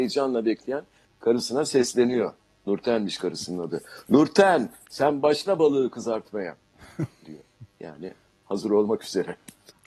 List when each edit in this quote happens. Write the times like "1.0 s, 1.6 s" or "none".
none